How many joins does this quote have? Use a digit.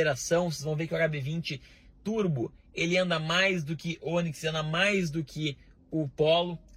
0